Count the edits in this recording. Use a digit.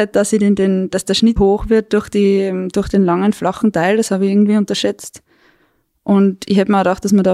1